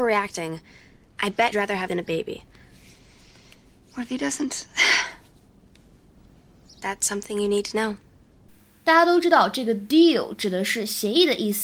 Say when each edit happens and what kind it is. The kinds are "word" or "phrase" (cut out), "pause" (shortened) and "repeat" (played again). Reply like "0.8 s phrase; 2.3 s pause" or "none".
1.5 s word; 1.9 s word; 6.8 s word

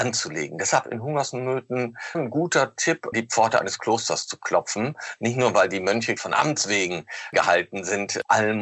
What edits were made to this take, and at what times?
2.1 s word; 3.1 s word; 6.2 s word

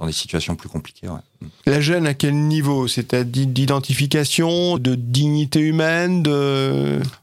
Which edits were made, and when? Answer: 4.8 s word

